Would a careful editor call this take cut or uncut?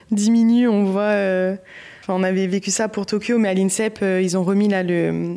cut